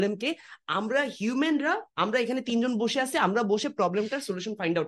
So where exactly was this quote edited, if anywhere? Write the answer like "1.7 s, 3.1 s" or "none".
1.9 s